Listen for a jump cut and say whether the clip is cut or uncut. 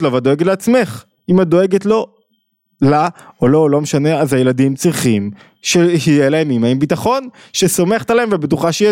uncut